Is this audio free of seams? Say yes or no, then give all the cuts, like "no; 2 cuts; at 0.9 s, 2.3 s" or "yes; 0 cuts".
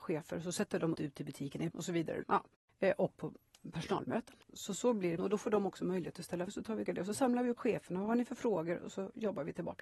no; 8 cuts; at 0.9 s, 1.7 s, 2.2 s, 3.2 s, 5.2 s, 6.5 s, 6.9 s, 7.6 s